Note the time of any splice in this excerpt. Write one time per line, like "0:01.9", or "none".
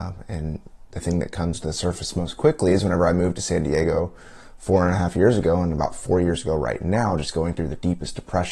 none